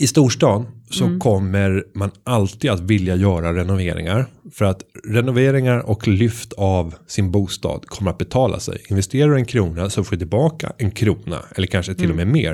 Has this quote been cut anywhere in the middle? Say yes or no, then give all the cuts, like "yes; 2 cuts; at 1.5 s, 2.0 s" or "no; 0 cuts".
no; 0 cuts